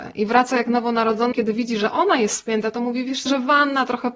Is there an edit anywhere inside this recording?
yes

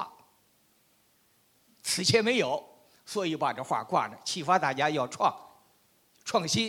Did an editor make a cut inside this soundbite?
no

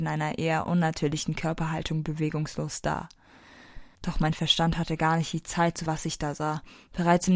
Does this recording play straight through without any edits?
no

